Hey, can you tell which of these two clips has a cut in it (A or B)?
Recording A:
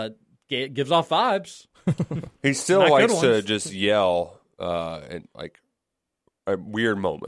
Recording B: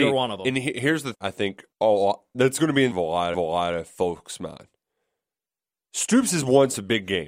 B